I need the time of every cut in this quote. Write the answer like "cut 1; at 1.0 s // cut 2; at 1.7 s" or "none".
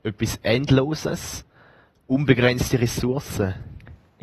none